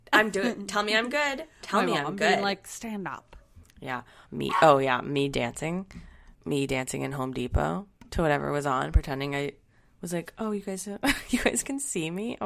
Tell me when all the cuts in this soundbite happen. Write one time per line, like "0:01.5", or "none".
0:06.3

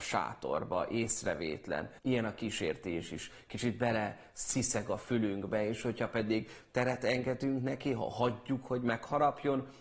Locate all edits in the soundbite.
0:02.0

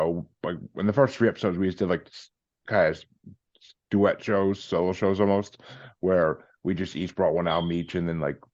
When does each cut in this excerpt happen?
none

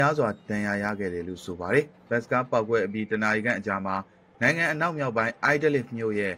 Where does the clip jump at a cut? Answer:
none

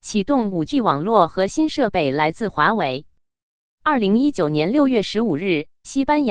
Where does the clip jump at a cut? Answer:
none

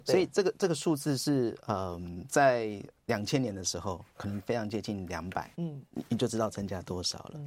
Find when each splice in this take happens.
0:05.5

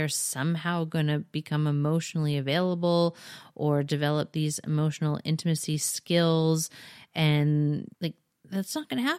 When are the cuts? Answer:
0:07.9

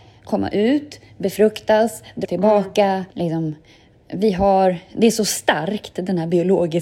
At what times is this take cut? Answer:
0:02.2
0:03.1

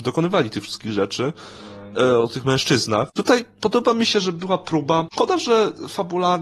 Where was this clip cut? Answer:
none

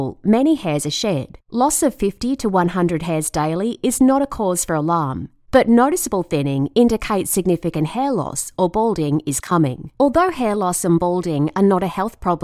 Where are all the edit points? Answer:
0:01.4
0:09.9

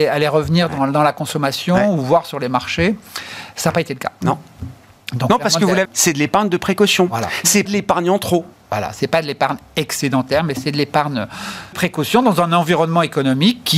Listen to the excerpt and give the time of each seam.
0:05.8
0:07.7
0:11.7

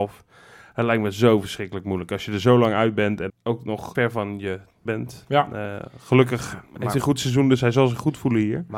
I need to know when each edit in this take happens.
0:03.3
0:03.9
0:04.9

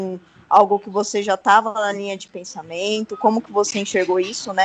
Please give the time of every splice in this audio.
none

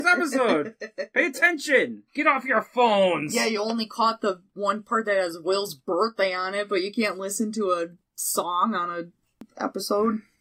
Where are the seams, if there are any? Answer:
0:02.1

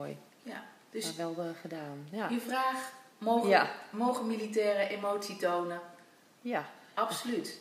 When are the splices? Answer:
none

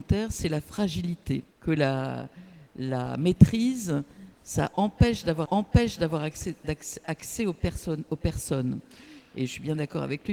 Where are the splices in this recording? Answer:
0:01.5
0:05.5

